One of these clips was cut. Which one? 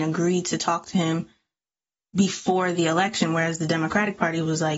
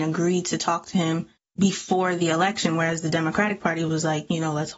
second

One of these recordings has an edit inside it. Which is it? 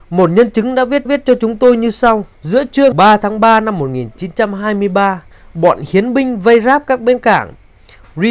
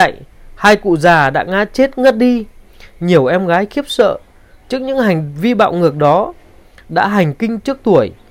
first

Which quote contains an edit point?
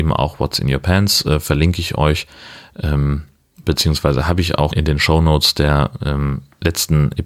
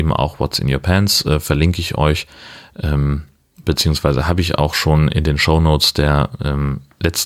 first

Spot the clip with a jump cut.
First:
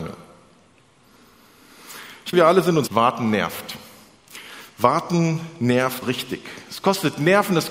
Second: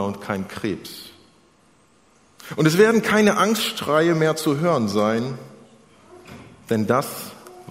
first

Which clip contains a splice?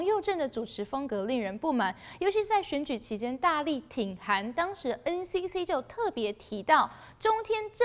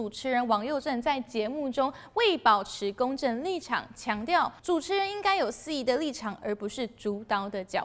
second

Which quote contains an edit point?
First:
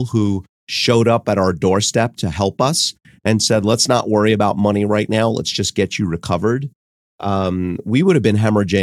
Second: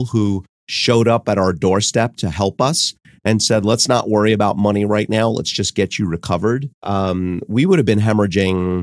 second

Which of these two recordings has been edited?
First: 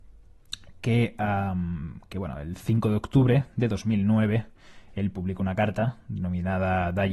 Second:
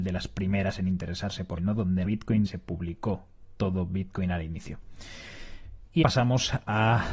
second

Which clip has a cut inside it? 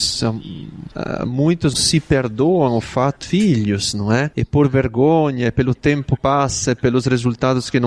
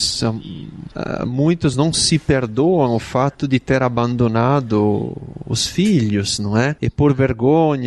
first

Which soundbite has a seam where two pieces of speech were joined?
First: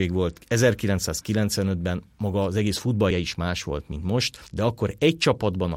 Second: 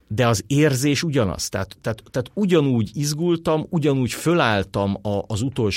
first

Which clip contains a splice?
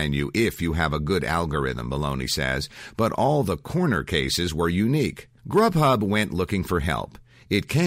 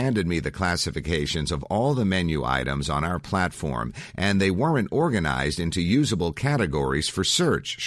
first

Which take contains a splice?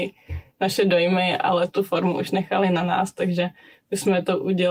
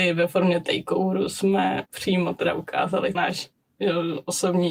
second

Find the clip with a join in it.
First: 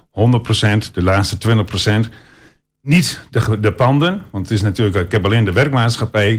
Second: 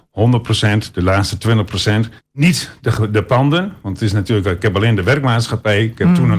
second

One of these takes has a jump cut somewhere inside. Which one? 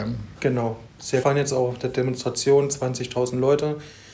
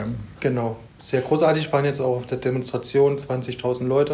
first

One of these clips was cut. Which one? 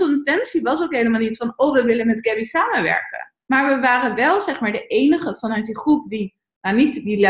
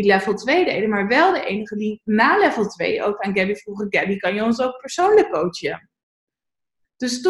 first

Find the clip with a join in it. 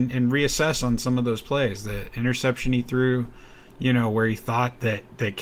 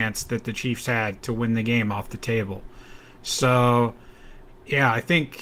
second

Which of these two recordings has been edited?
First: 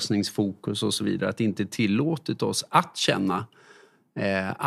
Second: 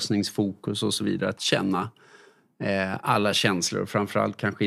second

